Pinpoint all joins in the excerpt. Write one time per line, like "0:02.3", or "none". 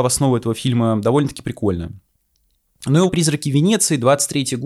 0:03.1